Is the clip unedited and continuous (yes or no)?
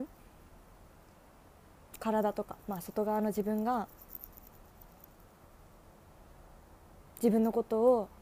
yes